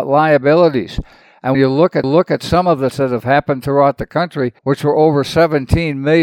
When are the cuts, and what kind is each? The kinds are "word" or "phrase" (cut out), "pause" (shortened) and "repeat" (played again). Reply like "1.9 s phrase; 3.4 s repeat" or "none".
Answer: 1.5 s word; 2.0 s repeat; 2.9 s word; 4.6 s pause

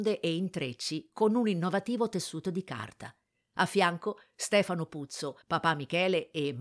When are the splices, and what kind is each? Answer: 5.4 s pause

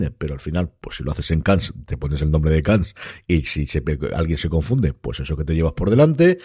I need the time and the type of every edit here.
none

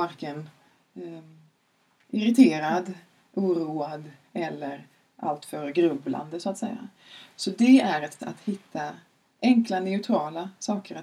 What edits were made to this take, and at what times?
8.2 s word

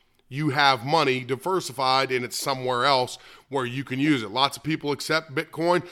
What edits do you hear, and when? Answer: none

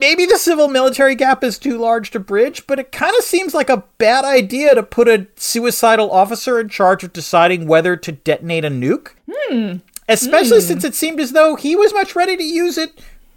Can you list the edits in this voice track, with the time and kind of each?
11.9 s word

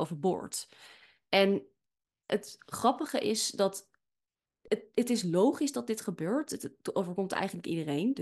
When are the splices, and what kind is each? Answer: none

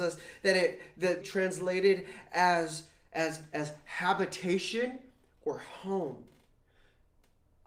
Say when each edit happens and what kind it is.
1.2 s phrase

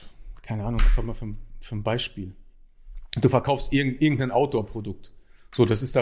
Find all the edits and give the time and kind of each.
none

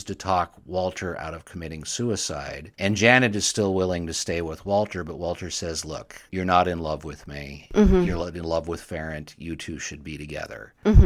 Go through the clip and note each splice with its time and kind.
2.7 s pause; 6.3 s pause

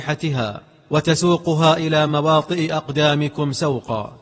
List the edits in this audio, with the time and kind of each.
none

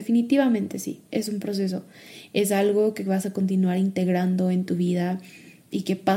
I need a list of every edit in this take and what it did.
none

